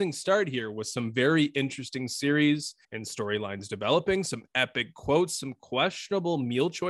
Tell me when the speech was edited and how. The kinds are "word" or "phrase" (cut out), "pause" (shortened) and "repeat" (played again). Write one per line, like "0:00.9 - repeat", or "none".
0:02.8 - pause